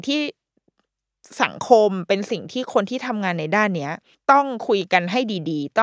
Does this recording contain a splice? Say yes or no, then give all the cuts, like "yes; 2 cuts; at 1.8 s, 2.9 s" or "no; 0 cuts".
yes; 1 cut; at 4.1 s